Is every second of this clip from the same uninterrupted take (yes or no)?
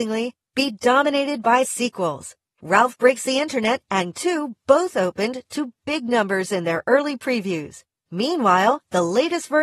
no